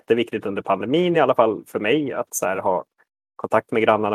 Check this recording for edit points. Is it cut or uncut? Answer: uncut